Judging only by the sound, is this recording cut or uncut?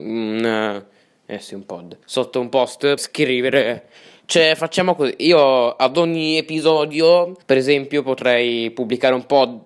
cut